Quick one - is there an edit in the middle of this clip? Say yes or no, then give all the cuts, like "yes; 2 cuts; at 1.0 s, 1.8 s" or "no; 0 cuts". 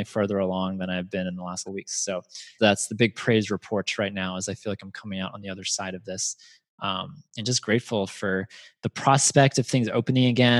yes; 2 cuts; at 1.7 s, 2.6 s